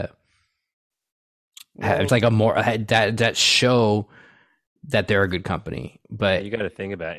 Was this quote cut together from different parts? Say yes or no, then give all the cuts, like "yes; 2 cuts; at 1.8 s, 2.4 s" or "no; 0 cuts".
yes; 1 cut; at 2.1 s